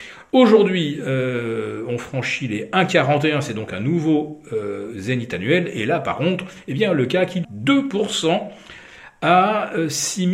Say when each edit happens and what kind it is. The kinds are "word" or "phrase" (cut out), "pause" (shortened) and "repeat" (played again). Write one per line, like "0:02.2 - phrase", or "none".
0:07.4 - phrase